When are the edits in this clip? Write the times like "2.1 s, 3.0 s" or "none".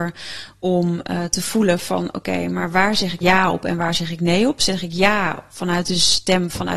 3.2 s